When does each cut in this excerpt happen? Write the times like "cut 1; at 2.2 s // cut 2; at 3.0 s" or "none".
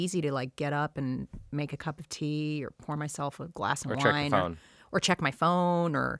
none